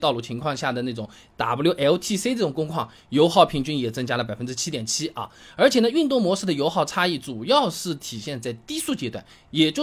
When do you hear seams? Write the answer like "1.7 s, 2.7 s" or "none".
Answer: none